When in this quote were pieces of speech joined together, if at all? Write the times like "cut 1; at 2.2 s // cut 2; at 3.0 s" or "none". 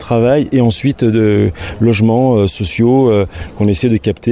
none